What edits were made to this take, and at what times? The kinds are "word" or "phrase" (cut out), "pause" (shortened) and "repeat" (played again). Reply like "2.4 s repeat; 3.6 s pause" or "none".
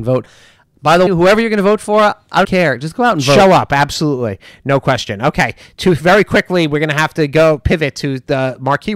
1.1 s word; 2.4 s word